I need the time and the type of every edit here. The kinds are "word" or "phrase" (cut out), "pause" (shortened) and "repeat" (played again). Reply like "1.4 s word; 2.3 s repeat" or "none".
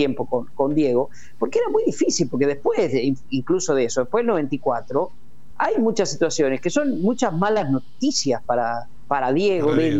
none